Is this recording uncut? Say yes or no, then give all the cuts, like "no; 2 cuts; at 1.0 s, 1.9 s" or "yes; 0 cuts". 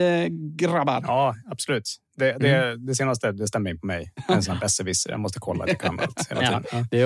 yes; 0 cuts